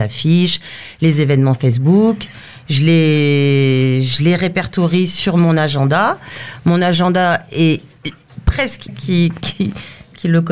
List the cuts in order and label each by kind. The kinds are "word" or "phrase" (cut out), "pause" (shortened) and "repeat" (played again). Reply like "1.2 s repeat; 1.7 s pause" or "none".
8.9 s phrase